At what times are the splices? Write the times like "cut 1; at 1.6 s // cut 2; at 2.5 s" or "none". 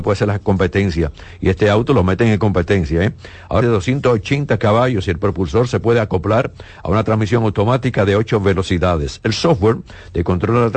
cut 1; at 3.6 s